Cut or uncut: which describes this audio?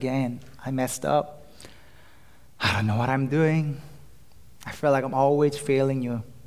uncut